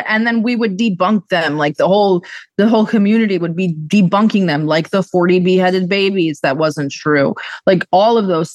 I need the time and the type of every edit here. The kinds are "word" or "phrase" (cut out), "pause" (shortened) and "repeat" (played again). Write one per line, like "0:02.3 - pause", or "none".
none